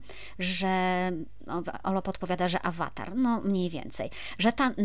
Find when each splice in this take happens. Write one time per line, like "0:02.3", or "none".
none